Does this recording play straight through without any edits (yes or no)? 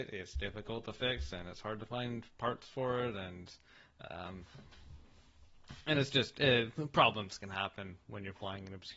yes